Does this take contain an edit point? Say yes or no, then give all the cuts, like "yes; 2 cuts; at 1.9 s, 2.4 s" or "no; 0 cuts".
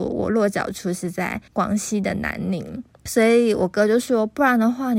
yes; 1 cut; at 1.5 s